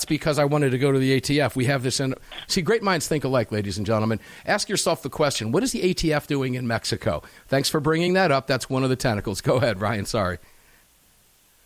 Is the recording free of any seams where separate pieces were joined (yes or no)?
yes